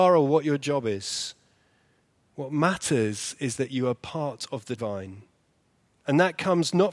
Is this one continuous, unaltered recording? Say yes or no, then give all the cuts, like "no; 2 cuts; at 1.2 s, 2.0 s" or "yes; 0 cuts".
no; 1 cut; at 4.8 s